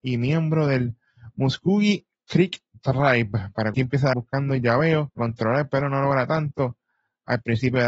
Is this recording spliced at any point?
yes; 3 cuts; at 3.7 s, 4.1 s, 5.2 s

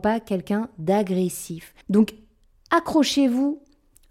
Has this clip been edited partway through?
yes; 1 cut; at 1.8 s

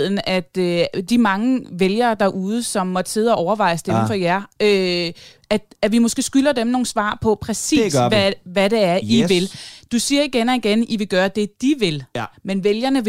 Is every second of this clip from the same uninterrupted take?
yes; 0 cuts

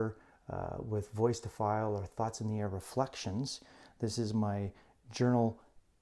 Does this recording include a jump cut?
no; 0 cuts

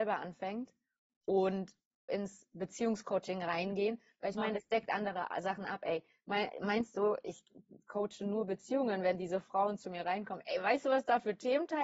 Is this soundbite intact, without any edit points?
no; 1 cut; at 2.1 s

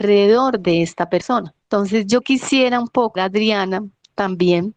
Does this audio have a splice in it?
yes; 3 cuts; at 1.6 s, 2.2 s, 3.2 s

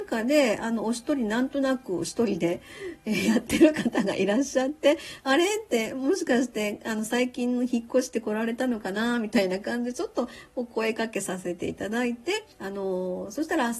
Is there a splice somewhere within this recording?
yes; 1 cut; at 12.5 s

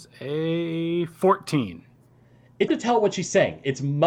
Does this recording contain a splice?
yes; 1 cut; at 2.7 s

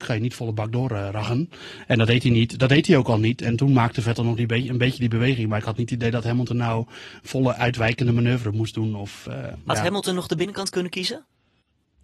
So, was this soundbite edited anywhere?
no; 0 cuts

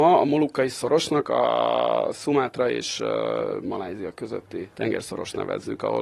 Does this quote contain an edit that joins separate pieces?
yes; 1 cut; at 4.7 s

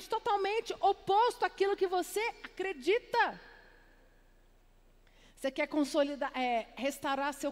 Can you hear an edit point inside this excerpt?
no; 0 cuts

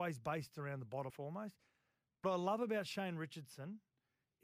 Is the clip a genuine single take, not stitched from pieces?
no; 2 cuts; at 1.1 s, 2.2 s

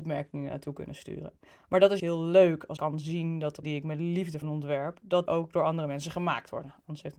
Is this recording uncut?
no; 5 cuts; at 2.0 s, 2.8 s, 3.6 s, 4.4 s, 5.3 s

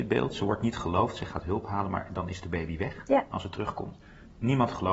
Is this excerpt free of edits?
yes; 0 cuts

